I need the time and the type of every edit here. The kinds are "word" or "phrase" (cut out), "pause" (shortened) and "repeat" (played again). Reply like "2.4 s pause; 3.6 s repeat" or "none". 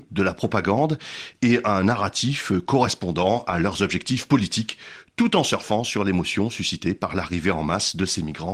none